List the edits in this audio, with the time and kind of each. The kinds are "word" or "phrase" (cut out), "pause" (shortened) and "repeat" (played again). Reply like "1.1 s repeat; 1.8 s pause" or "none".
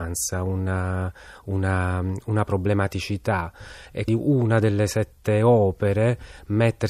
4.1 s word